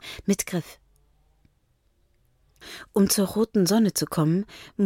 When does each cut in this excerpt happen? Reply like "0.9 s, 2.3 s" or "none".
none